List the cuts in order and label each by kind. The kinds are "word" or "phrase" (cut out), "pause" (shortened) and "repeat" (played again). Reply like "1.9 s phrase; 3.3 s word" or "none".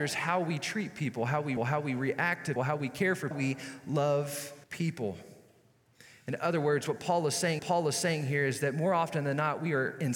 1.6 s repeat; 2.6 s word; 3.3 s phrase; 4.6 s pause; 7.6 s repeat